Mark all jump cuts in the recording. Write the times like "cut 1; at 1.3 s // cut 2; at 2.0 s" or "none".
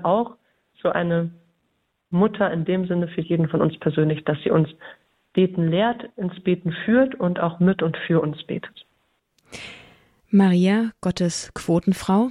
none